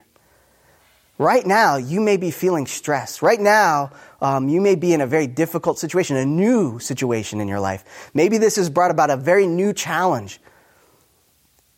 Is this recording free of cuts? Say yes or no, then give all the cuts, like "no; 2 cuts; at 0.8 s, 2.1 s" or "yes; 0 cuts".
yes; 0 cuts